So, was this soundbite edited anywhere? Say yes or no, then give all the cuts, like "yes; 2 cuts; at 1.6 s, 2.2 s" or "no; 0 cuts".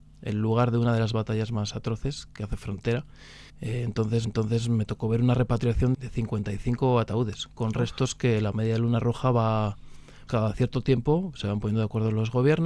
yes; 4 cuts; at 3.5 s, 4.2 s, 5.9 s, 10.3 s